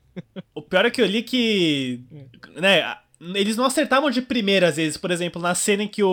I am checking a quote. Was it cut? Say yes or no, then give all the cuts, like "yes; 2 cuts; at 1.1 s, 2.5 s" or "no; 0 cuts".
no; 0 cuts